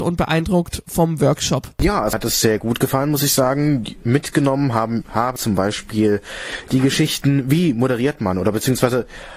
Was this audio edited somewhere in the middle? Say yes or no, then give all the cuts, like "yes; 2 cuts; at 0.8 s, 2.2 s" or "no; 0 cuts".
yes; 2 cuts; at 2.1 s, 5.4 s